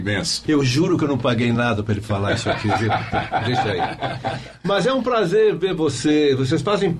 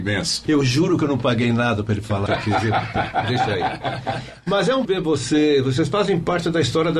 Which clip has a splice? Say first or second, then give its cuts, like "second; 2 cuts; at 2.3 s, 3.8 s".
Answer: second; 2 cuts; at 2.3 s, 4.8 s